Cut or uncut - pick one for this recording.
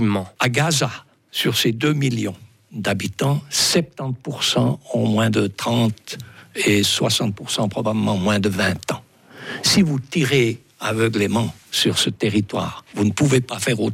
uncut